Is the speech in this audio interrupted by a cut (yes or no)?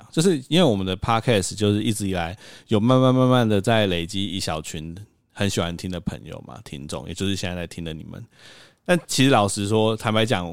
no